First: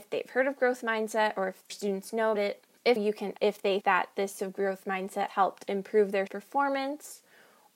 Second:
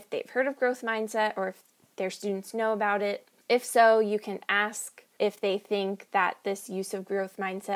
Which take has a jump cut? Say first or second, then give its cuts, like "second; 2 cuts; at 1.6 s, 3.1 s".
first; 8 cuts; at 1.7 s, 2.3 s, 3.0 s, 3.4 s, 3.8 s, 4.4 s, 5.3 s, 6.3 s